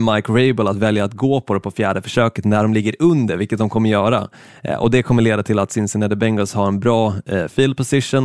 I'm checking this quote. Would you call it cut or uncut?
uncut